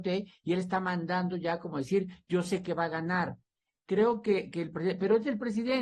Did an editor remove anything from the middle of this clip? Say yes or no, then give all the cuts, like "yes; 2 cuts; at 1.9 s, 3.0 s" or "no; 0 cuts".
no; 0 cuts